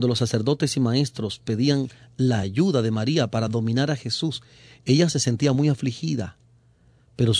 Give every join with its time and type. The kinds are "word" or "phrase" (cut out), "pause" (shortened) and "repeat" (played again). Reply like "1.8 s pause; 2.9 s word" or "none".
none